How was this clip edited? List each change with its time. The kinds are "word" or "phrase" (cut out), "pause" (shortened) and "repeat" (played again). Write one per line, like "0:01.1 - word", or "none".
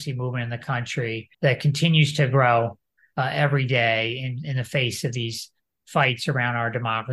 0:01.3 - pause